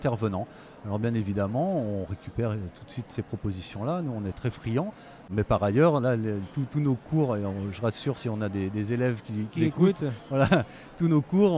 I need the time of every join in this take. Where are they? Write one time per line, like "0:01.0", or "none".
0:03.1
0:09.5